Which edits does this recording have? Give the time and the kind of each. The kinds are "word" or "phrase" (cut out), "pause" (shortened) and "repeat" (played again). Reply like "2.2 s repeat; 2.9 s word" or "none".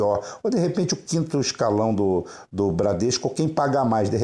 none